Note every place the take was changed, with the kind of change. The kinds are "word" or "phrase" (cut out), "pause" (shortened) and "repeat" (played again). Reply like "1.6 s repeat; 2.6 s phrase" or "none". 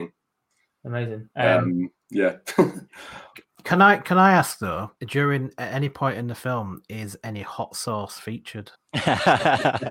1.3 s pause; 5.0 s pause; 8.7 s pause

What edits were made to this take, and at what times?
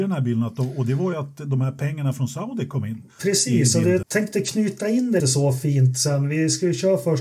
4.0 s word; 5.2 s word

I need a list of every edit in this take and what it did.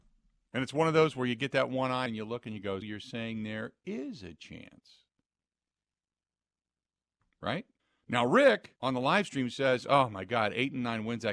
2.1 s word; 2.8 s word; 7.8 s pause; 8.8 s pause

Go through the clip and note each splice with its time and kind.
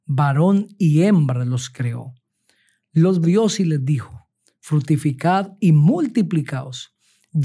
3.2 s word

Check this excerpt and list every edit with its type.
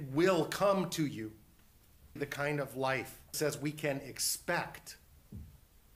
2.2 s word; 3.3 s word

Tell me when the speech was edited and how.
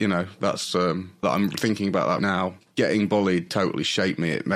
1.2 s word; 2.2 s word; 2.6 s pause; 3.5 s word

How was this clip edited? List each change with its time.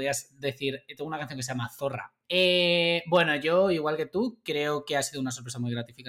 2.2 s pause

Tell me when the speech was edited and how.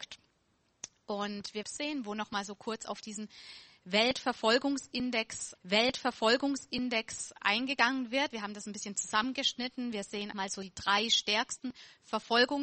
1.6 s phrase; 5.5 s repeat; 10.3 s word

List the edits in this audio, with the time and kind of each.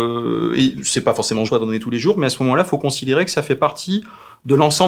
1.5 s phrase

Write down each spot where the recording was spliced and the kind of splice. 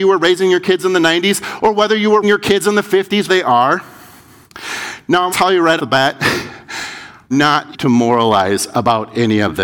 2.2 s word; 3.3 s word; 5.3 s word; 5.8 s word; 7.3 s word; 7.7 s word

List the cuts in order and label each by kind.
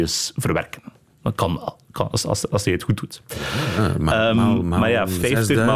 none

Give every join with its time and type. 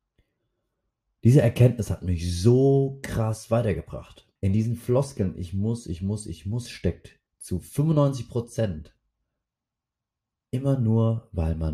4.4 s pause; 7.3 s pause

